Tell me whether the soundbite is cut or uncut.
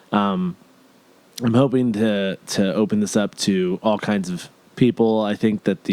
uncut